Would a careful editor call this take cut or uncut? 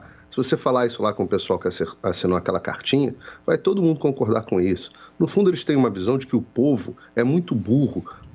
uncut